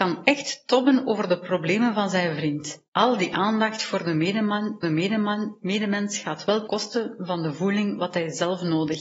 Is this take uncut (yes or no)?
no